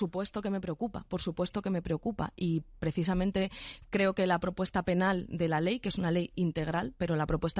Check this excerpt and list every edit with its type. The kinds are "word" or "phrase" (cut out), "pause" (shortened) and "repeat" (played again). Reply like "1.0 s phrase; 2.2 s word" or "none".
none